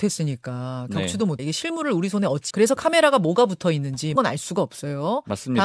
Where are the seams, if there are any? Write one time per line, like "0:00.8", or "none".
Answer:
0:01.4
0:02.5
0:04.2